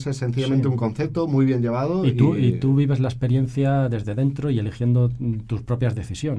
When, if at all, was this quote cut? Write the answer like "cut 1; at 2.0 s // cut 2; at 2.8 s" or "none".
none